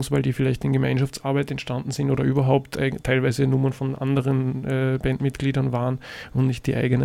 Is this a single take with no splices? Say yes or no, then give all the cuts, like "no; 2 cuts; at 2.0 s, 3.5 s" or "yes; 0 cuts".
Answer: yes; 0 cuts